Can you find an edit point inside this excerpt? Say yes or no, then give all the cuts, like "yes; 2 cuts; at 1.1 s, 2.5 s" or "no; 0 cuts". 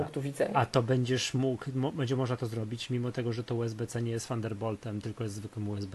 no; 0 cuts